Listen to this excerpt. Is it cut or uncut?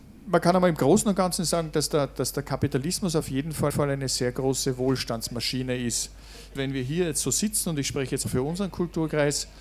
cut